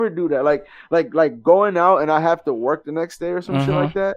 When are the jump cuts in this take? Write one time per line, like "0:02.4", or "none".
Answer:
none